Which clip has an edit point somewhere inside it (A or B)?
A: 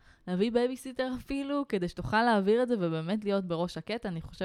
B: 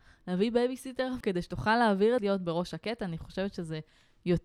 B